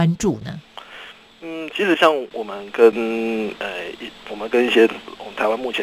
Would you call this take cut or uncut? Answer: uncut